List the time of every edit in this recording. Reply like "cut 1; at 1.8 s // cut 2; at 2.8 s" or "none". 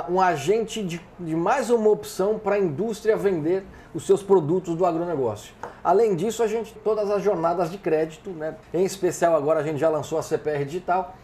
cut 1; at 6.8 s // cut 2; at 8.6 s